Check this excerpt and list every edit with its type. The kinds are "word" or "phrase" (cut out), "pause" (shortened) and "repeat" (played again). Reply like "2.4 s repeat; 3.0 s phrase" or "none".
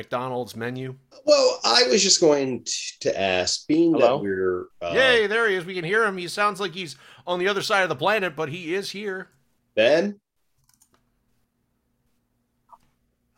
1.1 s pause